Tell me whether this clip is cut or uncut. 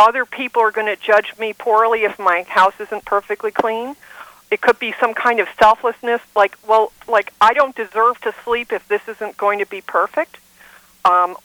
uncut